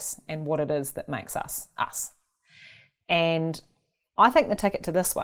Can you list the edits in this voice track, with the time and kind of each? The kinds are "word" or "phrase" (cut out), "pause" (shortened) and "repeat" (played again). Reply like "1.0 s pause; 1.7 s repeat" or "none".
none